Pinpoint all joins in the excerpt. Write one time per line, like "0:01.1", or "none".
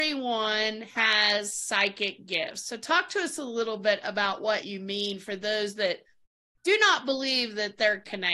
none